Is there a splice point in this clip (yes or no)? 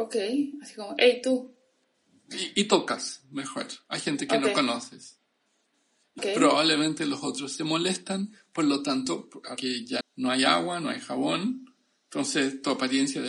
yes